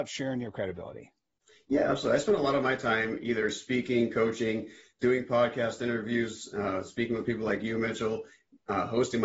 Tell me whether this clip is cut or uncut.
uncut